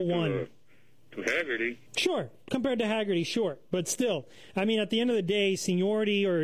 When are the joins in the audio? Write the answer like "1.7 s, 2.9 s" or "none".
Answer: 1.9 s